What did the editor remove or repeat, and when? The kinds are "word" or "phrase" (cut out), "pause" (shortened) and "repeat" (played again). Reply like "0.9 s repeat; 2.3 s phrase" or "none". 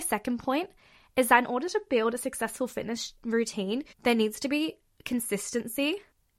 3.9 s pause